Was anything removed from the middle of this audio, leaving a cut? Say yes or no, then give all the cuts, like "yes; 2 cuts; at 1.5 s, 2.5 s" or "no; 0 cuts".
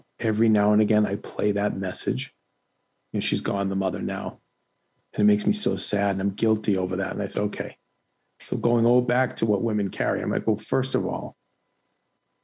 no; 0 cuts